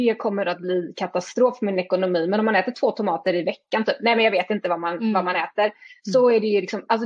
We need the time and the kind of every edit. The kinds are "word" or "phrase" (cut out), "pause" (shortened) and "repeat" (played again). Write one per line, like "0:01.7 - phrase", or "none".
none